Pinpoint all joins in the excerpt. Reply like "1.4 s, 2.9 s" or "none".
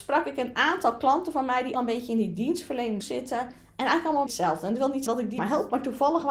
1.7 s, 3.0 s, 4.3 s, 5.1 s, 5.4 s